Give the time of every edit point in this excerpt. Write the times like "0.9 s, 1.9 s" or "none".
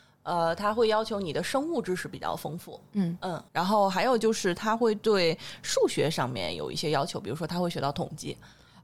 3.5 s